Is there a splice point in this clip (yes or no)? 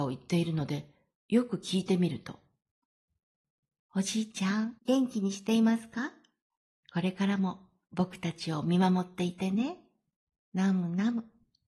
yes